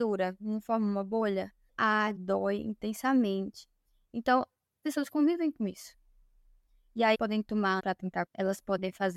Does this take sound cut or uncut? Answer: cut